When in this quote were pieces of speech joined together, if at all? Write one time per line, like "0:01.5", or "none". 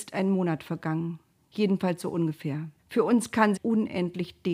0:01.3
0:02.8
0:03.6